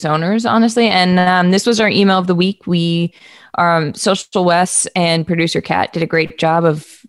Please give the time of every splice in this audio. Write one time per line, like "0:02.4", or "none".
none